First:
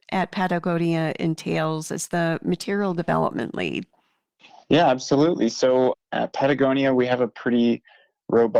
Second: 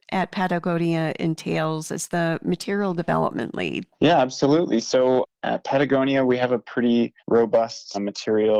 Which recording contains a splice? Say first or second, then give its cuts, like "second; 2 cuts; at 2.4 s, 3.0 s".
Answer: second; 2 cuts; at 3.9 s, 7.2 s